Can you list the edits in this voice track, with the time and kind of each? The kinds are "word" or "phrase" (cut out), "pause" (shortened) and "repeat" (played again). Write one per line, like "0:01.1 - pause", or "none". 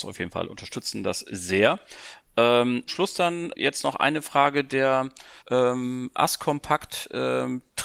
0:02.9 - phrase
0:03.5 - word
0:05.4 - pause